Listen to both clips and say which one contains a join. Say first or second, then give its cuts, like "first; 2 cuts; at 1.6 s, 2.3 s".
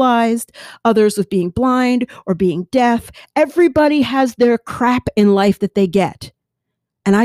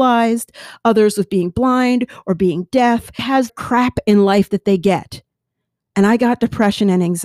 second; 2 cuts; at 3.2 s, 3.5 s